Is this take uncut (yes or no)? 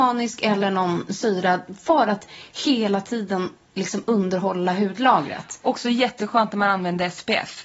yes